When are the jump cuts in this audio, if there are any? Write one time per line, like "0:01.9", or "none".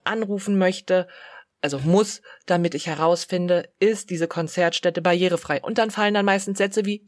none